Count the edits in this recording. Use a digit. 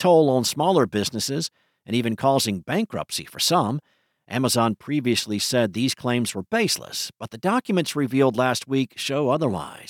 0